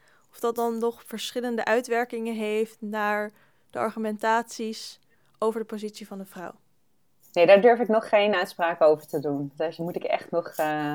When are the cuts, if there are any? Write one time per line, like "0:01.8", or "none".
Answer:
none